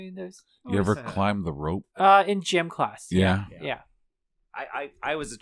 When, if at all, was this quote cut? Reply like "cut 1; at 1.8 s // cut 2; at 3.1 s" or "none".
cut 1; at 1.9 s